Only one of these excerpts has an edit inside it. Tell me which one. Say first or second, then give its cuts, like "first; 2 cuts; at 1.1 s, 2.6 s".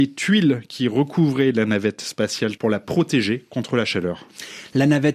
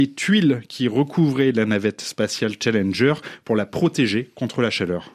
first; 1 cut; at 2.6 s